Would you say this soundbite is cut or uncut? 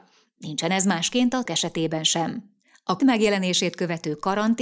cut